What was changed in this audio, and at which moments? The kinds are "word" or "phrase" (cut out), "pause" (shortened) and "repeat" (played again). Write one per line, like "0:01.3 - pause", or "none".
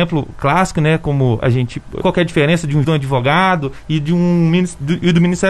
0:02.0 - phrase
0:02.8 - word